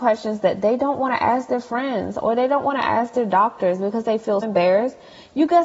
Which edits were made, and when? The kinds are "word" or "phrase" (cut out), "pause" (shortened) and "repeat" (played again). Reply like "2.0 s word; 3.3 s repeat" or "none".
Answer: 4.4 s word